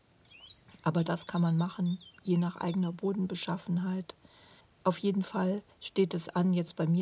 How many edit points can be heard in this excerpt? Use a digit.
2